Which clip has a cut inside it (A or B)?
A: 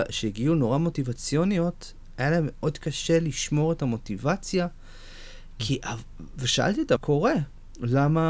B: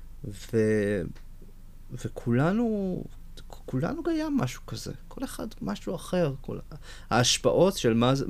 A